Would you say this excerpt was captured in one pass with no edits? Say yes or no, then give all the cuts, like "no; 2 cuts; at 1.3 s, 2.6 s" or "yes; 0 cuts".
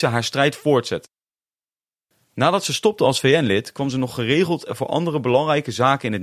yes; 0 cuts